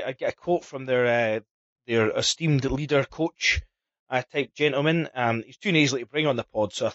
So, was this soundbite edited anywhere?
no; 0 cuts

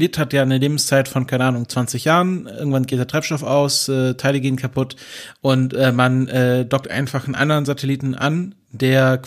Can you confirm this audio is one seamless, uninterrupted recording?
yes; 0 cuts

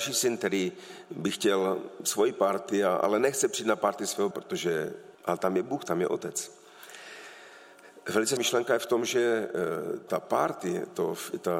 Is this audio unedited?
no; 4 cuts; at 4.3 s, 5.1 s, 8.4 s, 10.1 s

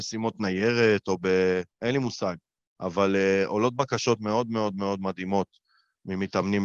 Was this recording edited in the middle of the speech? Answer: yes; 1 cut; at 1.7 s

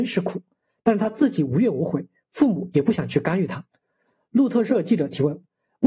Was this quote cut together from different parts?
yes; 1 cut; at 3.7 s

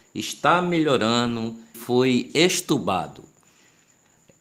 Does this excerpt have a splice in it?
yes; 1 cut; at 1.7 s

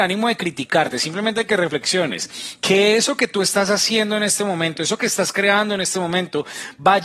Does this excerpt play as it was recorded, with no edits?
yes; 0 cuts

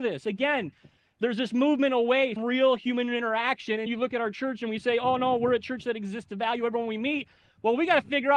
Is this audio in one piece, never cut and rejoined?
no; 2 cuts; at 2.4 s, 3.9 s

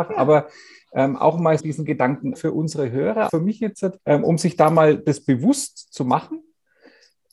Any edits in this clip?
yes; 4 cuts; at 1.6 s, 2.4 s, 3.3 s, 4.0 s

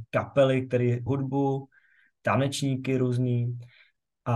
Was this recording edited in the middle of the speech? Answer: yes; 1 cut; at 1.1 s

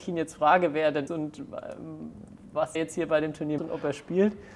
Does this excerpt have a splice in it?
yes; 3 cuts; at 1.1 s, 2.7 s, 3.6 s

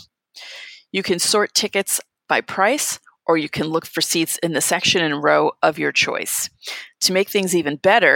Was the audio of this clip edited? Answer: no; 0 cuts

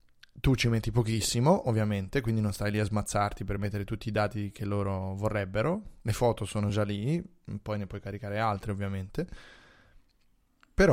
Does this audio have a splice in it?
no; 0 cuts

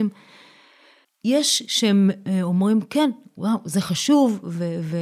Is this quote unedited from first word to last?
yes; 0 cuts

